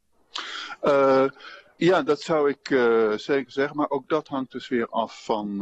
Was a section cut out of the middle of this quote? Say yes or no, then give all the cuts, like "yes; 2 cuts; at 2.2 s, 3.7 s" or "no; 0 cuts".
no; 0 cuts